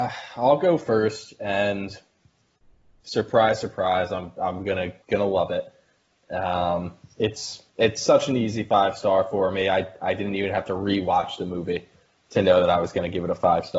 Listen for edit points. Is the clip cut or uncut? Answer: cut